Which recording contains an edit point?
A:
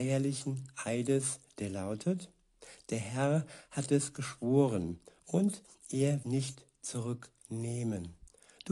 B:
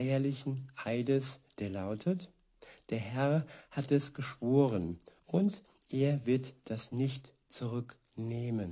A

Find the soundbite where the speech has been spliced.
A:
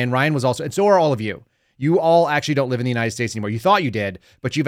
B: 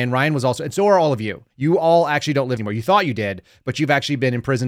B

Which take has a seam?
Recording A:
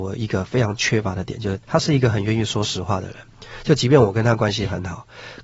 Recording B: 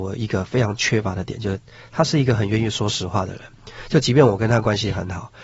A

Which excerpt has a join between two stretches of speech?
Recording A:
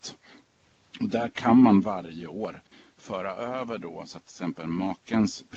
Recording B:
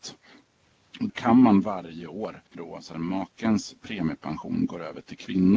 B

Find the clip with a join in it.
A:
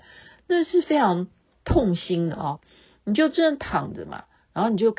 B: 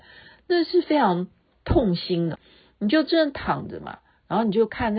B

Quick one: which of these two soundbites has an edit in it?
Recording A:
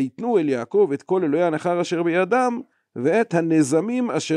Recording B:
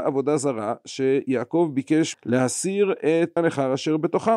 B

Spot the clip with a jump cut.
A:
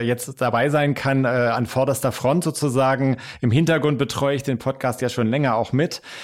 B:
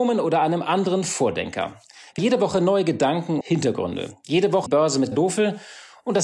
B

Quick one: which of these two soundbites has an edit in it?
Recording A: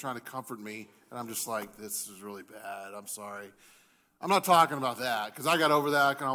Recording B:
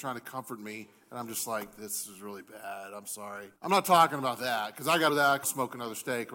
B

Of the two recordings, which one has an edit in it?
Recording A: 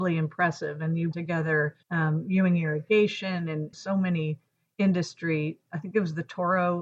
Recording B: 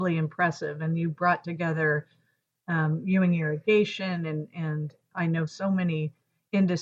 A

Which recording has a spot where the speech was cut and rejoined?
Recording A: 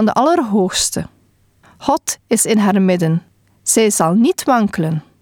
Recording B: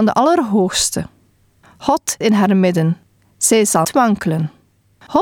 B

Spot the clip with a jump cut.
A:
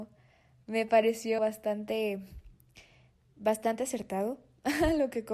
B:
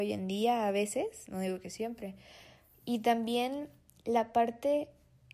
A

